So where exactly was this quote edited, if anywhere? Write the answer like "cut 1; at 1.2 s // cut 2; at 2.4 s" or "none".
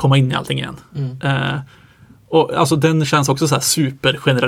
none